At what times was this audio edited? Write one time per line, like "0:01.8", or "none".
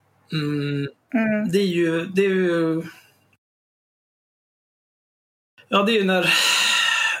none

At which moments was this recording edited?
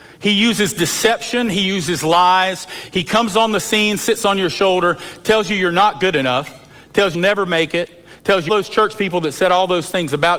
0:07.1
0:08.5

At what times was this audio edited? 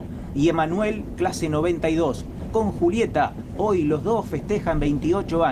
0:02.5

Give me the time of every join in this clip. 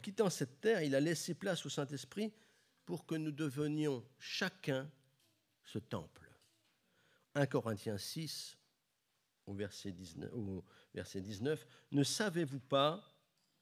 none

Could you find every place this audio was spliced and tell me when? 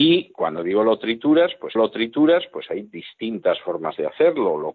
0:01.8

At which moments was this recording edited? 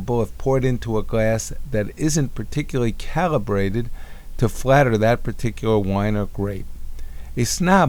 none

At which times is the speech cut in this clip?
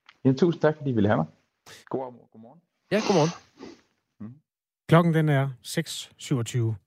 0:01.8

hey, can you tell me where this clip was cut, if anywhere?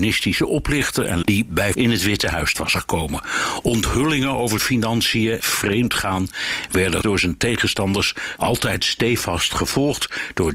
0:01.2
0:01.7
0:02.5
0:04.6
0:05.4
0:07.0
0:08.4

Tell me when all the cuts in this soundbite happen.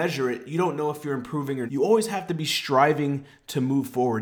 0:01.7

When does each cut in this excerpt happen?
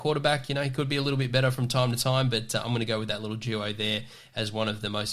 none

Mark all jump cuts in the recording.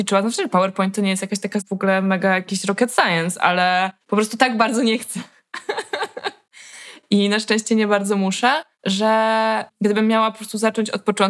0:04.0
0:08.7

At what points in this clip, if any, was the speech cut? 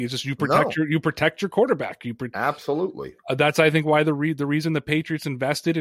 none

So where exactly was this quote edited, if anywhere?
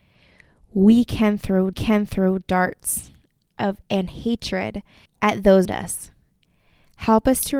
0:01.7
0:03.8
0:05.1
0:05.6

